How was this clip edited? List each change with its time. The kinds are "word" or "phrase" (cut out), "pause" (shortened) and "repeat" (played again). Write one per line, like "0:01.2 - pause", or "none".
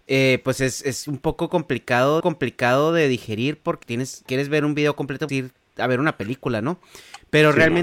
0:02.2 - repeat
0:03.8 - word
0:04.3 - phrase
0:05.3 - word